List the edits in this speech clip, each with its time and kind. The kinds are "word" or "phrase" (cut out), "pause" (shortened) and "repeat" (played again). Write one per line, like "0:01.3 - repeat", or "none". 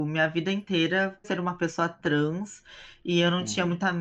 0:01.2 - word